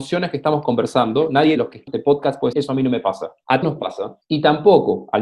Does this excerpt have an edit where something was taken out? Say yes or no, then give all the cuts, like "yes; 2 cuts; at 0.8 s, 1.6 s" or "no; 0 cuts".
yes; 4 cuts; at 1.6 s, 1.9 s, 2.5 s, 3.6 s